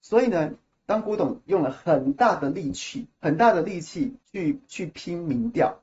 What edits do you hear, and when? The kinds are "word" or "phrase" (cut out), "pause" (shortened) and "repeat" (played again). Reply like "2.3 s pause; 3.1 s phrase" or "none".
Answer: 3.1 s pause; 4.2 s pause